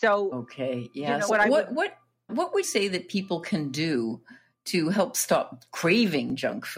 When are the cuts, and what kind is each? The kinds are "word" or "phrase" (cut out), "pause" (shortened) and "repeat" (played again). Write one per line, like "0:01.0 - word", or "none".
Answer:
0:01.3 - word
0:02.3 - word
0:02.6 - word